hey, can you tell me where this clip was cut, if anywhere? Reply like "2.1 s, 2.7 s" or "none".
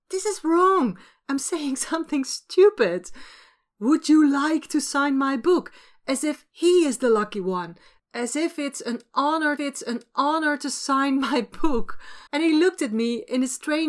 9.6 s, 12.3 s